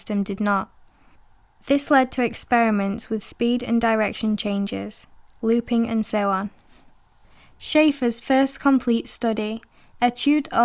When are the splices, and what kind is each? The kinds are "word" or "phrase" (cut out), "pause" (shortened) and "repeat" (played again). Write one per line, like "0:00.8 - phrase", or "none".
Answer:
none